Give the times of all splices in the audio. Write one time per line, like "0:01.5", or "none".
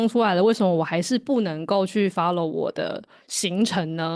none